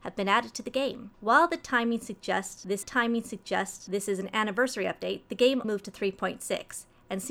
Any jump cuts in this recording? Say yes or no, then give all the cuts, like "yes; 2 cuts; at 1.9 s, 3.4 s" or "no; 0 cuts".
yes; 3 cuts; at 1.1 s, 2.8 s, 5.6 s